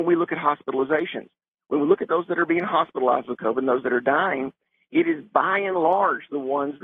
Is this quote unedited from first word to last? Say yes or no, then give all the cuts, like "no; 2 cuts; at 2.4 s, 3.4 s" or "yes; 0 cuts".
yes; 0 cuts